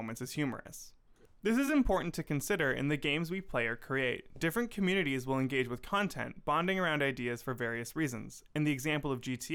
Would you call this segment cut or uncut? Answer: uncut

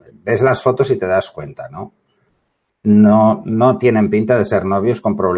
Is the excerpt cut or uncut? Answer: uncut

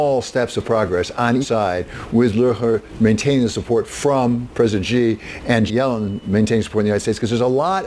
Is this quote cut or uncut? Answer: cut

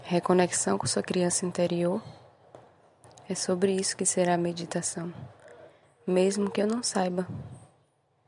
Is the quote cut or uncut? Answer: uncut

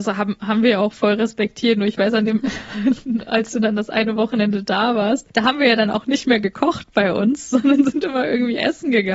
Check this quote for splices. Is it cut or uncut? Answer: cut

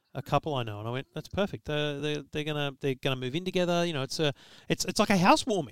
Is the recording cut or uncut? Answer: uncut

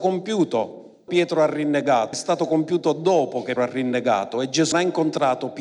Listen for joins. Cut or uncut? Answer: cut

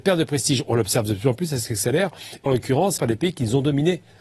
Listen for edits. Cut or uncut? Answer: cut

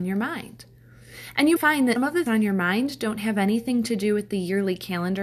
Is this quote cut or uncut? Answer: cut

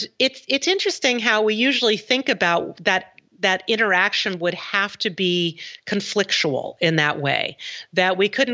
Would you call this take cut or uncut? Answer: uncut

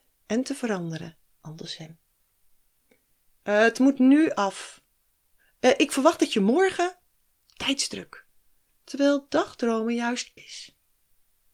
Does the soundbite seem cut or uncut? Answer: cut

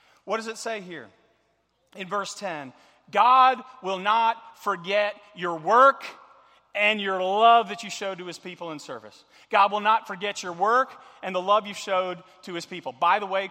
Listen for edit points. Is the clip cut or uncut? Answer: uncut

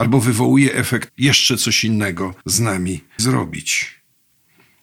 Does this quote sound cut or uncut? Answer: cut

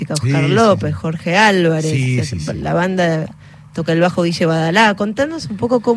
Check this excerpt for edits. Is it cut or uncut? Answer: uncut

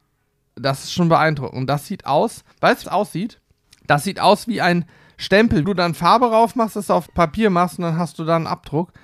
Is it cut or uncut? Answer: cut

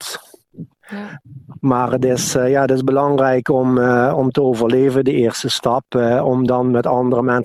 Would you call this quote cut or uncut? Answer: uncut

